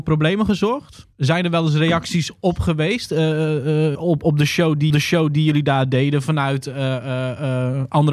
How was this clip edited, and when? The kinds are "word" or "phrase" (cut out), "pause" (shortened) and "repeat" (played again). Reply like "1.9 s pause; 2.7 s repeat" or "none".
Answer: 1.1 s pause; 3.9 s word; 4.9 s repeat